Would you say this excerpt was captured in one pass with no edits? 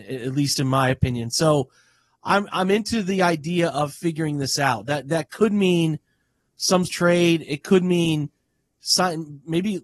no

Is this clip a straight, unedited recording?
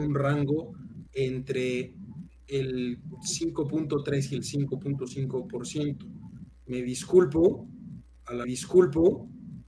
no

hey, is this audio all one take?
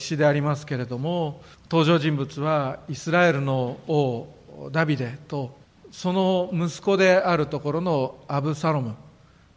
no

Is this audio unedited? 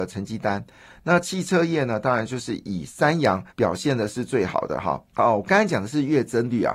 no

